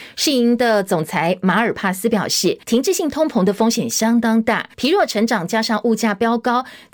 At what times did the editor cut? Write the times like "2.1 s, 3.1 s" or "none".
2.6 s, 4.7 s